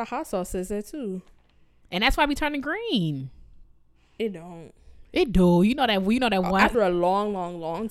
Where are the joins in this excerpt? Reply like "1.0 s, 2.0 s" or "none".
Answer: 6.7 s